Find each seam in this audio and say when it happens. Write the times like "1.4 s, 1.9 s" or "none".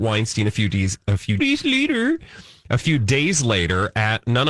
1.4 s